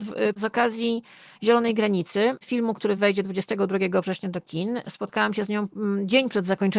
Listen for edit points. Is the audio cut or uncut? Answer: uncut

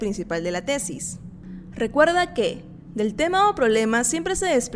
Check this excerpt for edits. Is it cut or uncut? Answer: uncut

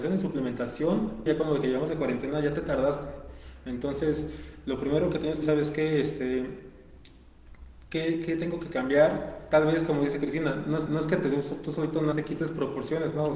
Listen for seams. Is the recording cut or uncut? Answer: cut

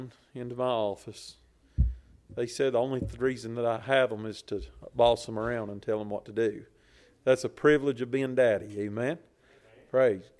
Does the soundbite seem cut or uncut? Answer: uncut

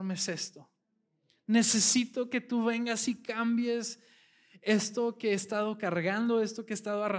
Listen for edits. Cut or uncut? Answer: uncut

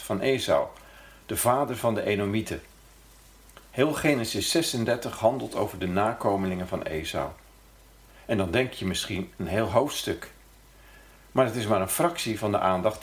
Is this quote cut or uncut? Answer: uncut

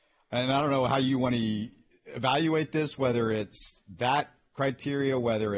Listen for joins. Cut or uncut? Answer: uncut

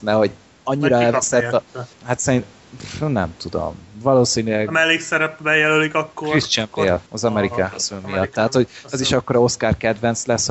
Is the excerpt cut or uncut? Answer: cut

